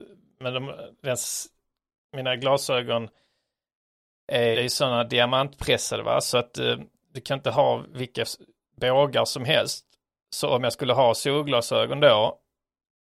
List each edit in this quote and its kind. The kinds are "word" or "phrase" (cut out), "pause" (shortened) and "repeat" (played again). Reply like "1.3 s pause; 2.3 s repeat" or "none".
4.5 s word